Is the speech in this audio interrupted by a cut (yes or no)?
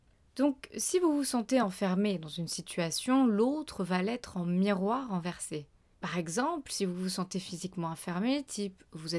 no